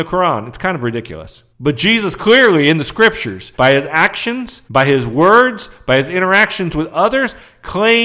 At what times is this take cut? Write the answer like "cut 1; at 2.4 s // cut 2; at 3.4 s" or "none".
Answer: cut 1; at 1.5 s // cut 2; at 3.5 s // cut 3; at 4.7 s